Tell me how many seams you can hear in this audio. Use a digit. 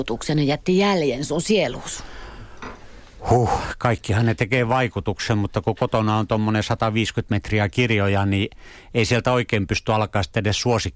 0